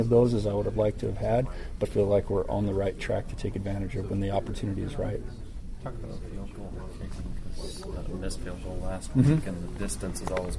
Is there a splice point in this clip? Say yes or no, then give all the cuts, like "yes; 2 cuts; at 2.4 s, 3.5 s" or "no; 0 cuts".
yes; 1 cut; at 1.8 s